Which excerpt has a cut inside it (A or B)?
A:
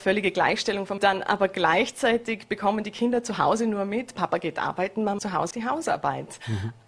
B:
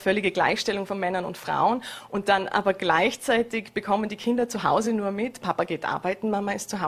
A